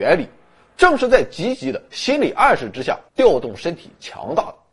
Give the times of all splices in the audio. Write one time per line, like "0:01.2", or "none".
0:03.1